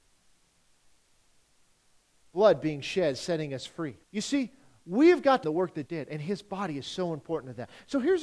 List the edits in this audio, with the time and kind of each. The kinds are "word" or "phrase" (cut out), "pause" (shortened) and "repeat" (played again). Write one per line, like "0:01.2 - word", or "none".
0:04.0 - pause
0:05.4 - phrase
0:05.9 - word